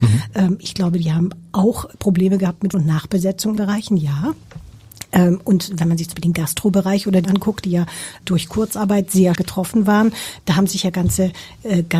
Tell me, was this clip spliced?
yes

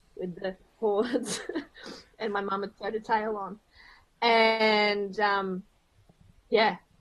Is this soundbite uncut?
yes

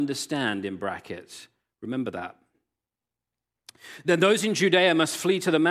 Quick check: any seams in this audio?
no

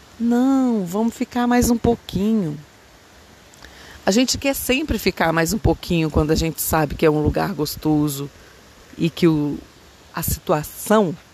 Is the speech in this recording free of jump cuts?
yes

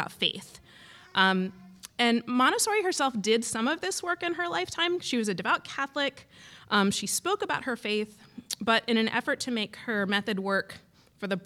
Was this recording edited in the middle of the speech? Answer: no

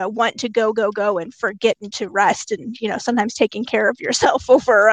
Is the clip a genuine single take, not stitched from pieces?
yes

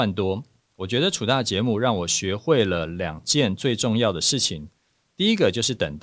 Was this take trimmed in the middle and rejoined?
no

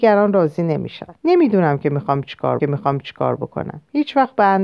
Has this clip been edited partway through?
yes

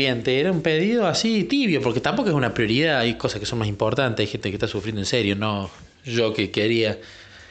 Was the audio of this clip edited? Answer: no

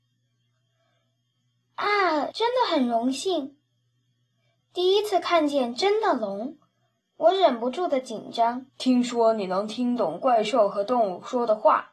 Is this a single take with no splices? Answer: no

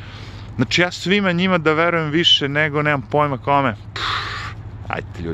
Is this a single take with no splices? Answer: yes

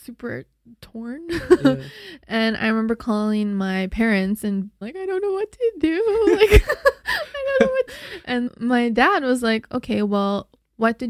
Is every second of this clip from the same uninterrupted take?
no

